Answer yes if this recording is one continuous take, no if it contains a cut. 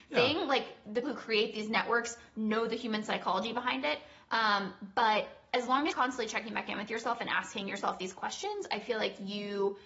no